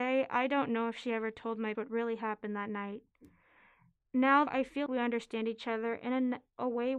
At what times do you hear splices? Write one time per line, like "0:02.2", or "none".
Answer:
0:01.7
0:04.5
0:04.9